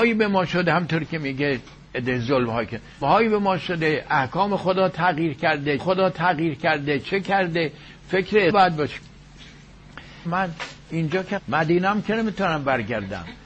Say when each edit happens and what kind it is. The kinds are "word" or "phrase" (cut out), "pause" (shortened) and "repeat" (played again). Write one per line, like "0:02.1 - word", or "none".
0:03.0 - word
0:05.8 - repeat
0:08.5 - word
0:10.2 - phrase
0:11.4 - phrase